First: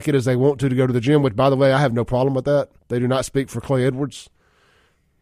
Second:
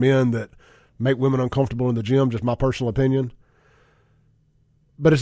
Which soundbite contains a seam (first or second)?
first